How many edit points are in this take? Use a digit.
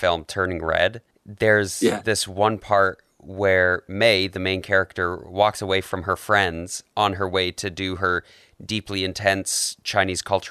1